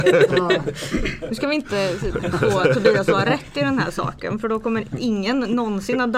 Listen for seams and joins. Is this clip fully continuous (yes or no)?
yes